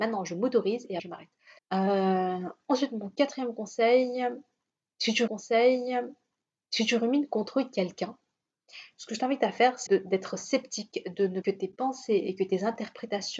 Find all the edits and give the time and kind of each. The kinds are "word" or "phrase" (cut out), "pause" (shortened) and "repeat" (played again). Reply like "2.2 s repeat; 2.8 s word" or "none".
1.0 s word; 1.6 s pause; 5.3 s repeat; 9.9 s word; 11.4 s phrase